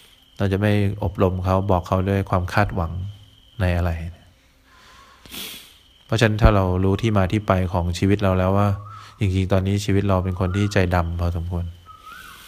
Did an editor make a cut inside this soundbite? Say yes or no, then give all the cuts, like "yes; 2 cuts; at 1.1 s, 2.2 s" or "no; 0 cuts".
no; 0 cuts